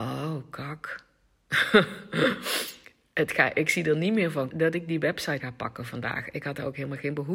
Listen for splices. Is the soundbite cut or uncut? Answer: cut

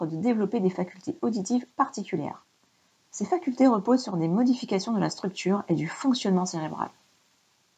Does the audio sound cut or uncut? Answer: cut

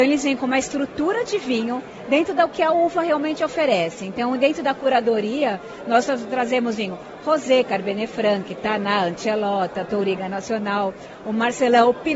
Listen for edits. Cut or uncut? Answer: uncut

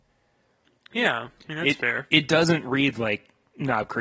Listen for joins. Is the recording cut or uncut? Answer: uncut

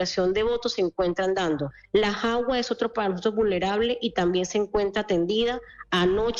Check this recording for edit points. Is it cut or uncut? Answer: cut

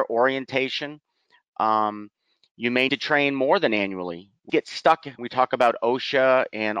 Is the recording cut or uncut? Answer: cut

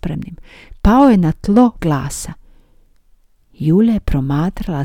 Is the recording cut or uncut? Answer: cut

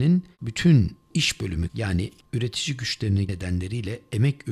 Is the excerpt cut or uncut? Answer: cut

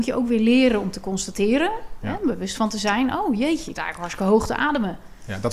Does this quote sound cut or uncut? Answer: cut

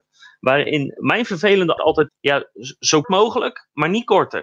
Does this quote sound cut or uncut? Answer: cut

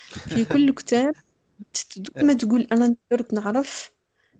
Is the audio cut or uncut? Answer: cut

